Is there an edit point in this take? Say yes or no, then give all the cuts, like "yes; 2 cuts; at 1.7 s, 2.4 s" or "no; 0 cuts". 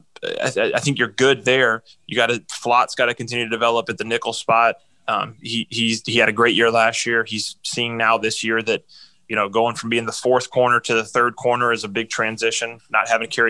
no; 0 cuts